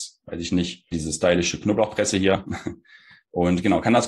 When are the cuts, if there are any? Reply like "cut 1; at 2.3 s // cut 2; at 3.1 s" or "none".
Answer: cut 1; at 0.9 s